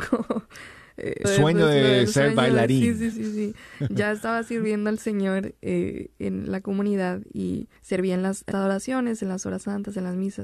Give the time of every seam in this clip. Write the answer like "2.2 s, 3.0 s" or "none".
1.2 s, 3.1 s, 7.8 s, 8.5 s